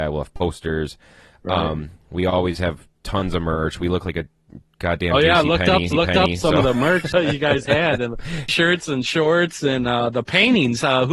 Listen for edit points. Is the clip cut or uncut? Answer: cut